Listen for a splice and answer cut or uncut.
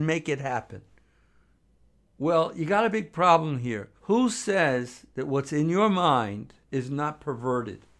cut